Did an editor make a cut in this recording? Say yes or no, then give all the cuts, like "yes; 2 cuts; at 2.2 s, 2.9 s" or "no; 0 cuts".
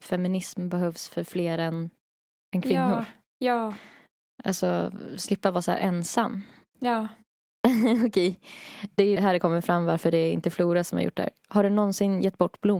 yes; 1 cut; at 9.2 s